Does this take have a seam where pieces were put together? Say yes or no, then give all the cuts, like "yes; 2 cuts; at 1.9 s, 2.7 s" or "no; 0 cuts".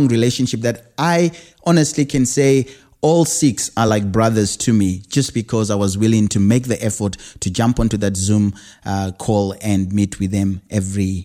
no; 0 cuts